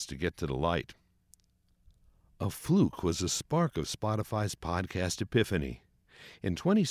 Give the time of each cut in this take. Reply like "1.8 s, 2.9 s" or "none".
none